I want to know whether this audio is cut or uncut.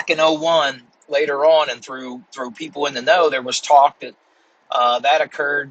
uncut